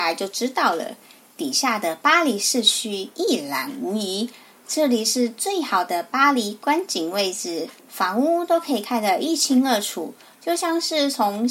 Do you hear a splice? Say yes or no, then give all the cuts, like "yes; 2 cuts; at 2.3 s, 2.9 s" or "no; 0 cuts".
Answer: yes; 1 cut; at 7.8 s